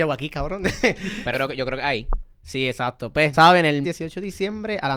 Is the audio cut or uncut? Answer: cut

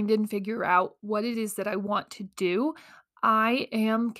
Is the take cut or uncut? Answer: uncut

